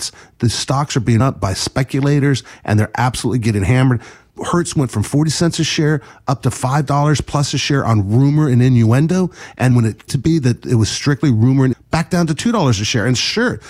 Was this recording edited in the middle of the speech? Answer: yes; 4 cuts; at 1.2 s, 9.7 s, 10.1 s, 11.7 s

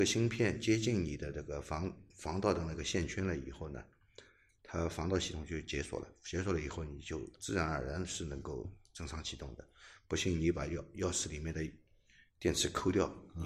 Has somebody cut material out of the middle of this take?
no; 0 cuts

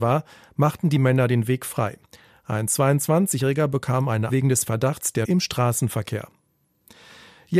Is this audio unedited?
no; 2 cuts; at 4.3 s, 5.2 s

